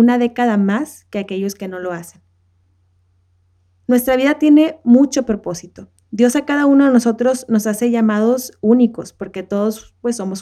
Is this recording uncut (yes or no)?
yes